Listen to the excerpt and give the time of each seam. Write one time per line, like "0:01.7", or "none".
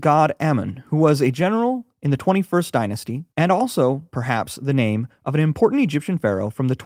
0:01.9
0:03.3